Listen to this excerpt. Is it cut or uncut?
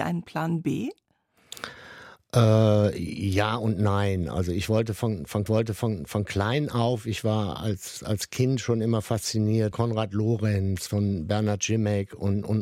cut